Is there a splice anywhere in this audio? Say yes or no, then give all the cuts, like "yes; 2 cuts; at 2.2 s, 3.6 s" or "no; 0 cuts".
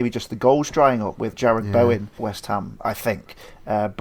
yes; 2 cuts; at 1.3 s, 2.2 s